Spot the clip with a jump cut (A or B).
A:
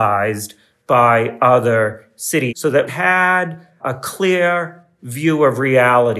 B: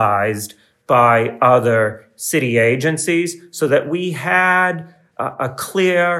A